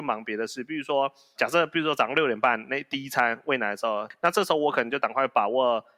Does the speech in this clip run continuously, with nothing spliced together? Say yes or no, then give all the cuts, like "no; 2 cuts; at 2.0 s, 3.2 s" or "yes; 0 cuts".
no; 1 cut; at 1.4 s